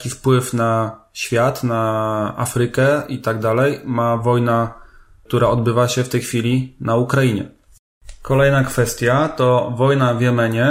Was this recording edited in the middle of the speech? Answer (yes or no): no